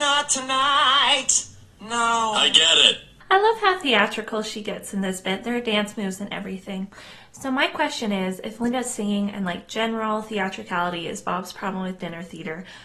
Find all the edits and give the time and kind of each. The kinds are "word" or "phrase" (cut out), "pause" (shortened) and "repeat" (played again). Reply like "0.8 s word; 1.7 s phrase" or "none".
none